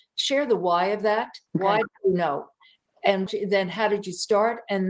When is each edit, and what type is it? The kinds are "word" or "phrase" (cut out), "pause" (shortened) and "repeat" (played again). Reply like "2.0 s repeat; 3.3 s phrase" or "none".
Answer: 1.5 s pause; 3.3 s word